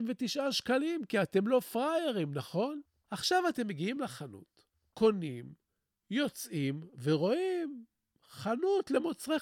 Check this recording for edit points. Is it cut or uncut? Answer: uncut